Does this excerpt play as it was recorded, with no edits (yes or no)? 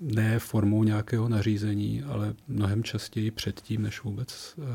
yes